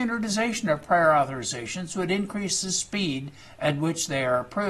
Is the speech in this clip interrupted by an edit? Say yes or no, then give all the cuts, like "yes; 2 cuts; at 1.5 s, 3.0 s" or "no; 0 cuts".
no; 0 cuts